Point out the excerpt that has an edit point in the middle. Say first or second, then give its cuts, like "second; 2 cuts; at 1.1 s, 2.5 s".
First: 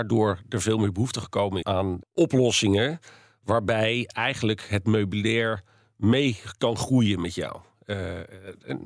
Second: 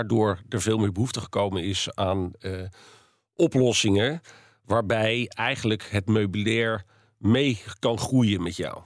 first; 2 cuts; at 1.6 s, 2.0 s